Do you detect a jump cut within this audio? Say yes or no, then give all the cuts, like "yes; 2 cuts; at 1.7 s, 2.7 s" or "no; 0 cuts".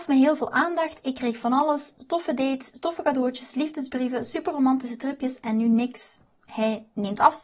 no; 0 cuts